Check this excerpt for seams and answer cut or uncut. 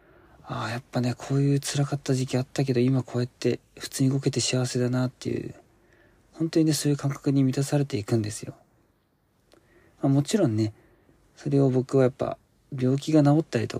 uncut